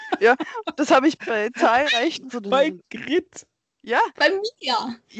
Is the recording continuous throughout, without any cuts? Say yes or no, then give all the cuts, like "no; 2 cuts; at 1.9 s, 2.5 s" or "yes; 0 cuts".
no; 2 cuts; at 1.2 s, 2.3 s